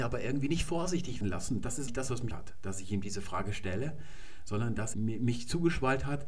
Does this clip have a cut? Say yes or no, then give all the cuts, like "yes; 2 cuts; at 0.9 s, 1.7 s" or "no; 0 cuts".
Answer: yes; 4 cuts; at 1.2 s, 1.9 s, 2.3 s, 4.9 s